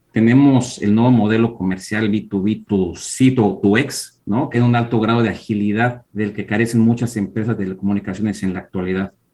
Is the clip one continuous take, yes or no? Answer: no